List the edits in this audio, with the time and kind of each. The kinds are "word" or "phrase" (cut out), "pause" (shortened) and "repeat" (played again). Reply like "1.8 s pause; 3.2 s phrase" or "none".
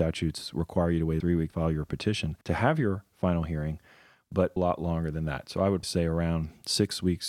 1.2 s phrase; 1.5 s phrase; 2.4 s pause; 4.6 s phrase; 5.8 s word